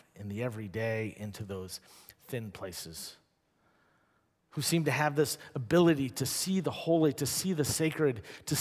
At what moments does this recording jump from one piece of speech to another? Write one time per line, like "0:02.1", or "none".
none